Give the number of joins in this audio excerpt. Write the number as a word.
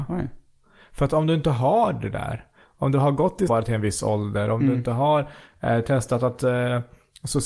one